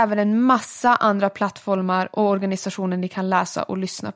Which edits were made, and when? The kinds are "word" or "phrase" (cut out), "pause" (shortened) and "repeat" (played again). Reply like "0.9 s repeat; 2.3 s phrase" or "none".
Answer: none